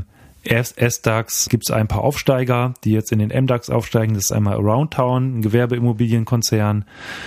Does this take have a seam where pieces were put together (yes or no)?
no